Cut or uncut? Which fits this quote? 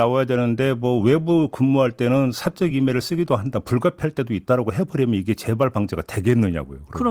uncut